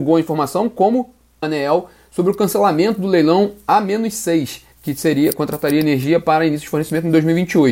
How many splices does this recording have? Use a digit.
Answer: 2